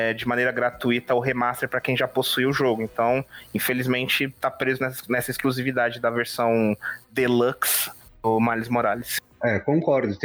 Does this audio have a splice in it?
no; 0 cuts

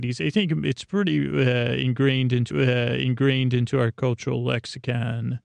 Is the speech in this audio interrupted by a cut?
yes; 1 cut; at 2.5 s

